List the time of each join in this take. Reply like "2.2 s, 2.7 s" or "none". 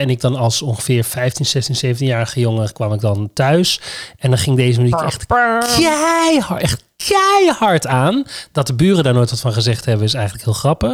none